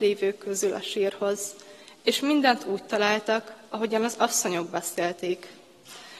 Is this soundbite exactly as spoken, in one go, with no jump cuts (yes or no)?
yes